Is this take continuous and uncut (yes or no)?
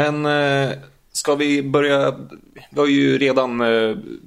yes